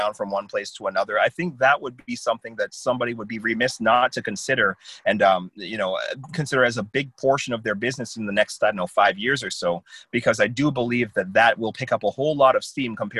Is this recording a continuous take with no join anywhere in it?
yes; 0 cuts

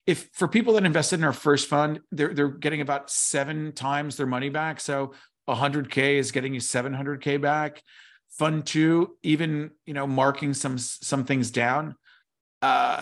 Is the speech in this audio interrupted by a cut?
no; 0 cuts

